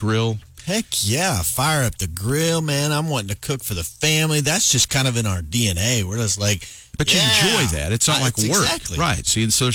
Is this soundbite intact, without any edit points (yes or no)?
yes